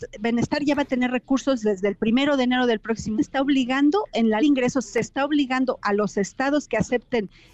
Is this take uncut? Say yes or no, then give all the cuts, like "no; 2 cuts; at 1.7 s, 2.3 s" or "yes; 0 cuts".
no; 2 cuts; at 3.1 s, 4.4 s